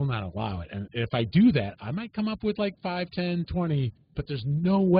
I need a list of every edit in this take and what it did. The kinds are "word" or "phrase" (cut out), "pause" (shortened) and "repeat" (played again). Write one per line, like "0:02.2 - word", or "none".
none